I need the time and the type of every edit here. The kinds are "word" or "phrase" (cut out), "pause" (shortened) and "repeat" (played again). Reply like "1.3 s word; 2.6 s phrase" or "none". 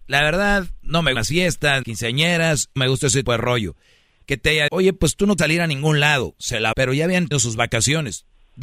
1.2 s word; 1.8 s word; 2.8 s word; 3.2 s word; 4.7 s word; 5.4 s word; 6.7 s word; 7.3 s word